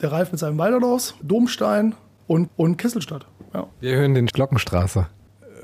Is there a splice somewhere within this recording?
yes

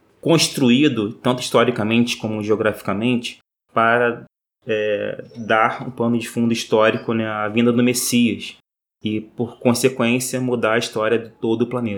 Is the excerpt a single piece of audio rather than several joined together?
yes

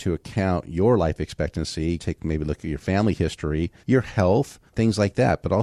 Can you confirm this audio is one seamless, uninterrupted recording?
no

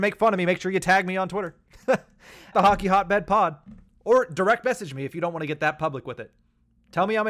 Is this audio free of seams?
no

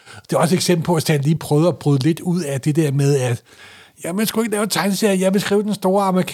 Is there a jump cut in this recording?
no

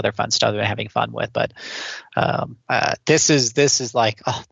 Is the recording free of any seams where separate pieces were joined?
no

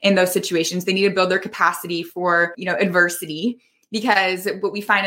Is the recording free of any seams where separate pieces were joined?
yes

